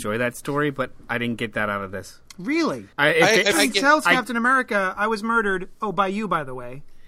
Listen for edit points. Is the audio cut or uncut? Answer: cut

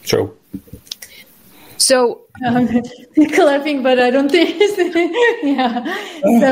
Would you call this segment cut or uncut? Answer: uncut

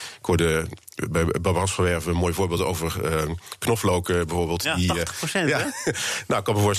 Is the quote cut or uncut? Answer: uncut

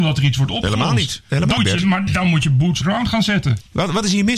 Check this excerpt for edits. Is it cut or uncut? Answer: cut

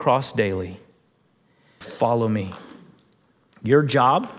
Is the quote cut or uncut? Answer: cut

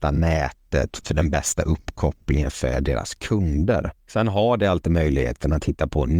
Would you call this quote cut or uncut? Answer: cut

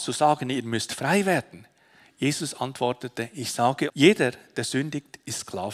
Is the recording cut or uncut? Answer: cut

